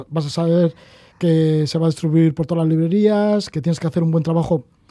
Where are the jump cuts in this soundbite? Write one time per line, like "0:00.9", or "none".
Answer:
none